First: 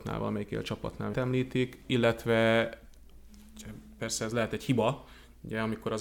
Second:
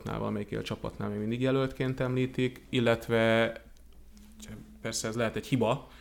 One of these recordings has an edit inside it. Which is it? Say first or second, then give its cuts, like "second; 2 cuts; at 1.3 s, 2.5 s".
first; 1 cut; at 1.1 s